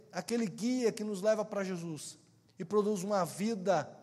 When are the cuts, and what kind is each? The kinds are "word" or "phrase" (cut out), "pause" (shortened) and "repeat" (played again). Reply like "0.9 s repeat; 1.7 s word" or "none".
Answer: none

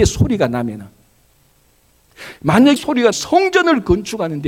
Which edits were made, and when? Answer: 2.8 s word; 3.1 s word

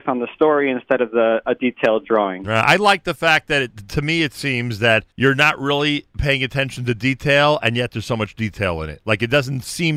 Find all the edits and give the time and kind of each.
5.1 s pause

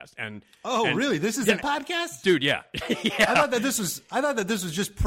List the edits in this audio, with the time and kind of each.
1.6 s word

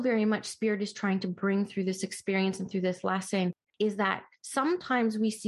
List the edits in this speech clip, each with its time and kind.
none

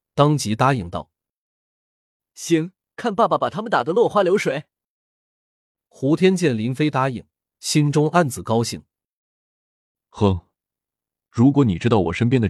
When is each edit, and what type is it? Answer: none

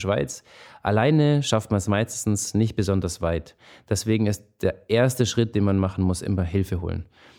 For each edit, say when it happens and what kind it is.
none

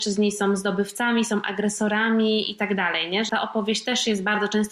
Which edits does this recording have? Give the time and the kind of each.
3.3 s word

